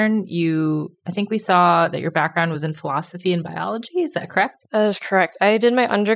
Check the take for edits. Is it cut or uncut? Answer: uncut